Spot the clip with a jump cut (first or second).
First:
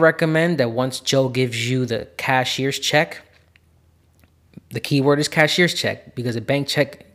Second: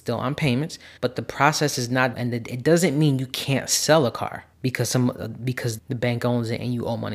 second